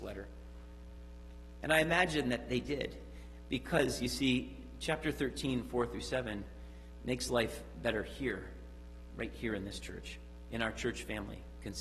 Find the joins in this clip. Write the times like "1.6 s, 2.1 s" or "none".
none